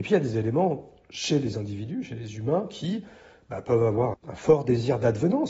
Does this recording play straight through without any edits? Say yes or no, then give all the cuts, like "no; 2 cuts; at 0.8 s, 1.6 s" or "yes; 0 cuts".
no; 1 cut; at 4.1 s